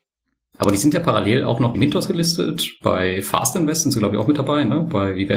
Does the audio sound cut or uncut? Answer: cut